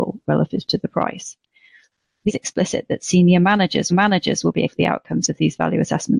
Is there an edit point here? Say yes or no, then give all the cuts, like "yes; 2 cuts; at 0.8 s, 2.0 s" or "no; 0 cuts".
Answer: yes; 3 cuts; at 2.3 s, 3.9 s, 4.7 s